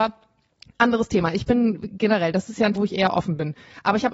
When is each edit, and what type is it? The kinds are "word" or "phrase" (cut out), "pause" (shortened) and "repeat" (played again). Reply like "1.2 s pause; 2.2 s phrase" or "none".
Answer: 2.8 s word